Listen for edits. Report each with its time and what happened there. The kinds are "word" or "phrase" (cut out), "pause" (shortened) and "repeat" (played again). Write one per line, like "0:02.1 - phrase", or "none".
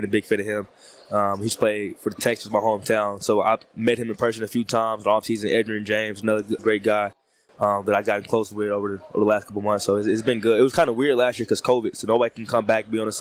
0:06.6 - word